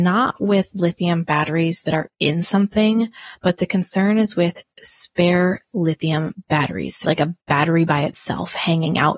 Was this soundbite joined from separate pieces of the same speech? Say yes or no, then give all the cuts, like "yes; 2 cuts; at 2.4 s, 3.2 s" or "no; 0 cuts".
yes; 1 cut; at 7.0 s